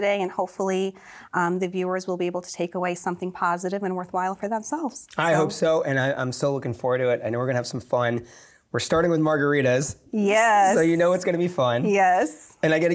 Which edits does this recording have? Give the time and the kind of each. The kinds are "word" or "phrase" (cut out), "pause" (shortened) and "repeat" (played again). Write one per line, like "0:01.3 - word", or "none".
none